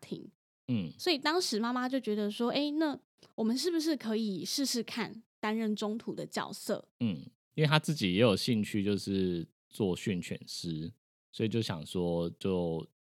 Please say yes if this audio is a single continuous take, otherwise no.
no